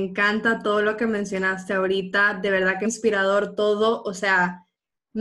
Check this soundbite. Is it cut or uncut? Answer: cut